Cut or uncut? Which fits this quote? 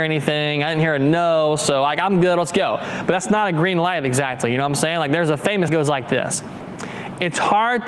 cut